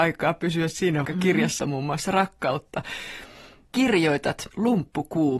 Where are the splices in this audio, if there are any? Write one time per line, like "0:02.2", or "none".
0:01.0
0:01.6
0:04.5